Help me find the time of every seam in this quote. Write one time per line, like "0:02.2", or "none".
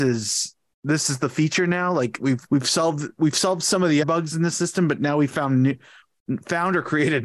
0:02.5
0:04.0